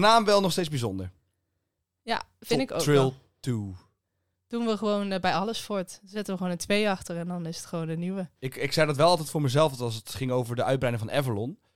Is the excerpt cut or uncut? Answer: uncut